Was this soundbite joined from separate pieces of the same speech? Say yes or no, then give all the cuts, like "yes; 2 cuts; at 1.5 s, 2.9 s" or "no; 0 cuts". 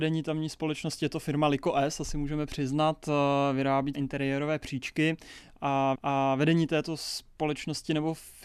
yes; 2 cuts; at 3.9 s, 5.9 s